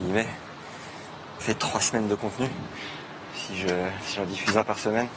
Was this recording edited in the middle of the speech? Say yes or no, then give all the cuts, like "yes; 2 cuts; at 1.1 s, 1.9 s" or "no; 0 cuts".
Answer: yes; 1 cut; at 1.4 s